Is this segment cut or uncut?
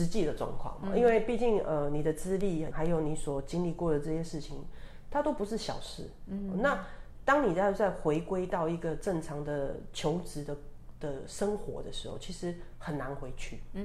cut